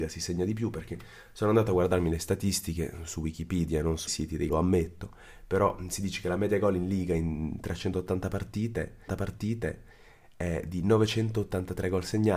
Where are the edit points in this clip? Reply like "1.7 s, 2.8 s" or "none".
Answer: 4.1 s, 4.5 s, 9.1 s